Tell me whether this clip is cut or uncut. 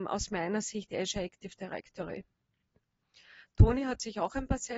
uncut